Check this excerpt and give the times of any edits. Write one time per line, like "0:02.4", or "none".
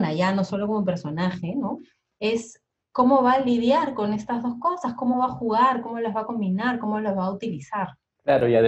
none